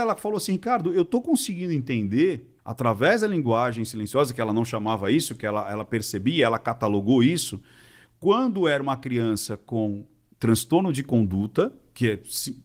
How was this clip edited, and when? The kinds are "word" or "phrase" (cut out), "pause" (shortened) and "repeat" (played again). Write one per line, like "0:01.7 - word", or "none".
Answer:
0:02.6 - pause